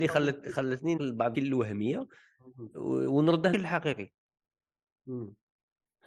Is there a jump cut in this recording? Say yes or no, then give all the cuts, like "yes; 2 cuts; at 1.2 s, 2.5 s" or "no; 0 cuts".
yes; 3 cuts; at 1.0 s, 1.3 s, 3.5 s